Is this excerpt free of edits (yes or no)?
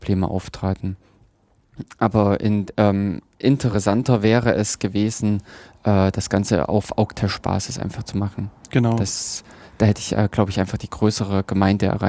yes